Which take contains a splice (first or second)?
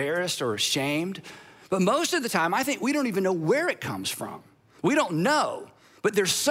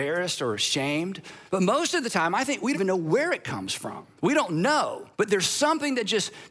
second